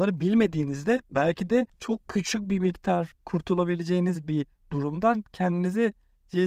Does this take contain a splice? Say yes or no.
yes